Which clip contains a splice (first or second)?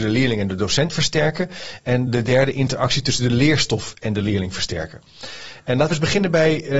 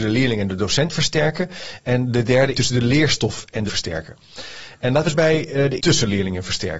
second